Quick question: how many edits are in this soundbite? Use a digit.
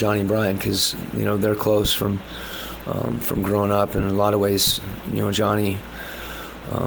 0